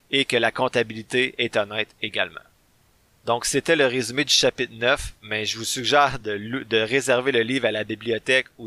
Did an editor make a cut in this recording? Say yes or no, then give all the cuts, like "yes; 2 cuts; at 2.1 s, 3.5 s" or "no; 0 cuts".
no; 0 cuts